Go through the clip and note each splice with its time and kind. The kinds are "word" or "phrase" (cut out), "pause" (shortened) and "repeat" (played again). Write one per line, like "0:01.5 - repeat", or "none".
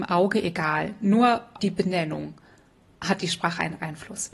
0:01.6 - word